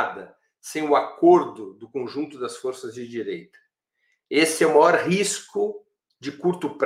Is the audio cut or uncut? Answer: uncut